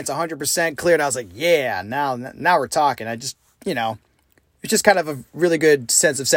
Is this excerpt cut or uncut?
uncut